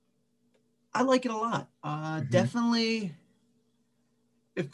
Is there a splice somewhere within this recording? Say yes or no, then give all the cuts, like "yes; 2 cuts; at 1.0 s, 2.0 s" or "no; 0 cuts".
yes; 1 cut; at 1.7 s